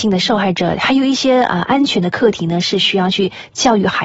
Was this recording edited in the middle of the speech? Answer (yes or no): no